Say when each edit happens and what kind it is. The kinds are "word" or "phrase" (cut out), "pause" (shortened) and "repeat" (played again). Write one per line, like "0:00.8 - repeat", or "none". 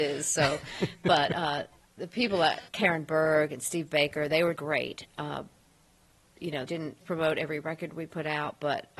0:02.7 - word
0:04.5 - word
0:06.7 - word
0:07.0 - word